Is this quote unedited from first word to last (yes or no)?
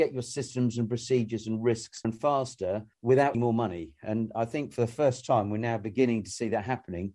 no